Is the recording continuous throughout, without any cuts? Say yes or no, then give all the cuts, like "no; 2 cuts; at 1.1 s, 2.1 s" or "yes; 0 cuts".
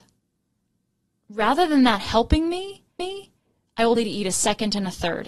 no; 2 cuts; at 3.0 s, 4.0 s